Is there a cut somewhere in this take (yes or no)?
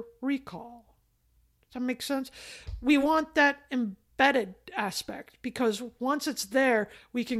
no